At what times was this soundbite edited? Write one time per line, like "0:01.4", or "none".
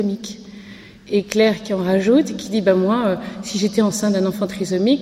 none